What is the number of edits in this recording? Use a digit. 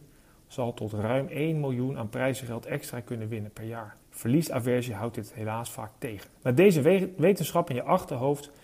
2